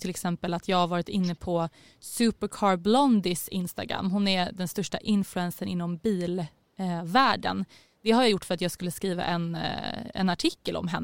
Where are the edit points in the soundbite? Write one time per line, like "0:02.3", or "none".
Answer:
none